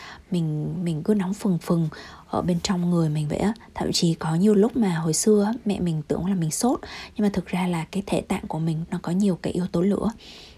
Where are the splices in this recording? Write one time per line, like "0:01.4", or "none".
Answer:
0:08.8